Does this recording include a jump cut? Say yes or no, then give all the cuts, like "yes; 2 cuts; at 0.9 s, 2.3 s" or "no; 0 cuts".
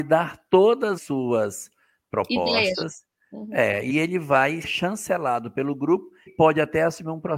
yes; 4 cuts; at 1.0 s, 3.9 s, 4.6 s, 6.3 s